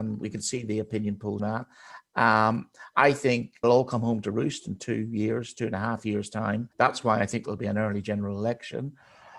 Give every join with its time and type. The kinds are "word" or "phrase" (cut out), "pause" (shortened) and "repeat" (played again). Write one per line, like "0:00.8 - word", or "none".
0:01.4 - word
0:03.6 - word
0:06.7 - pause